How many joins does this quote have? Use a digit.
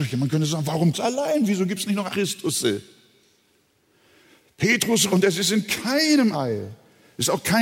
4